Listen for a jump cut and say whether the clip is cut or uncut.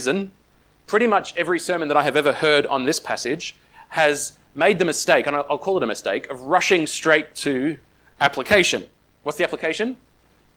uncut